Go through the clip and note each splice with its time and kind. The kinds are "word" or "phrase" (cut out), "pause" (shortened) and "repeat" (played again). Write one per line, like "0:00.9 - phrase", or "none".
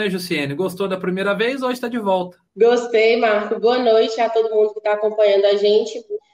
0:02.5 - pause

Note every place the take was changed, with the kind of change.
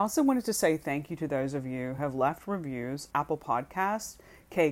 0:02.0 - word
0:03.1 - word

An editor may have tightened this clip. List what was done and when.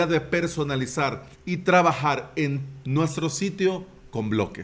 0:01.3 - pause
0:02.8 - word

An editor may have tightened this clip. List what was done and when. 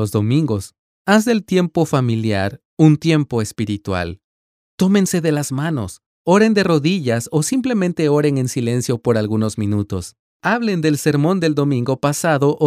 none

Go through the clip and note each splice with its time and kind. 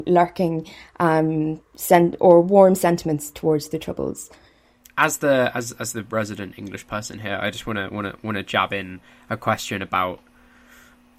none

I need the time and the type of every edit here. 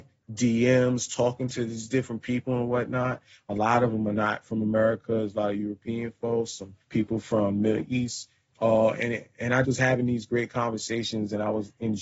0:06.8 - pause
0:09.6 - word

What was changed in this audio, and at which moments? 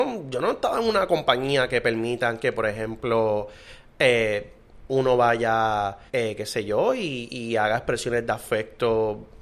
0:06.1 - pause

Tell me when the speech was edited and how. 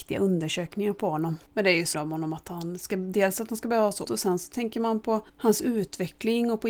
0:01.5 - pause
0:01.9 - word
0:04.0 - word
0:05.3 - pause

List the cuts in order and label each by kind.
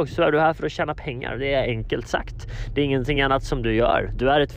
none

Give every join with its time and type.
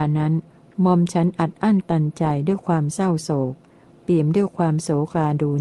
none

